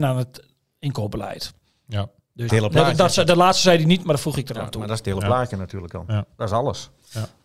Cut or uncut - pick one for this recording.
cut